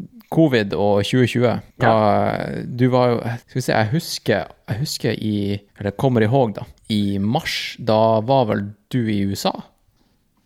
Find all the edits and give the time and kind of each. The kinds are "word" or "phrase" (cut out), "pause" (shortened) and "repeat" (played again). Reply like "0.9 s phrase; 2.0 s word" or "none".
1.7 s pause; 3.4 s pause; 5.7 s pause; 6.8 s pause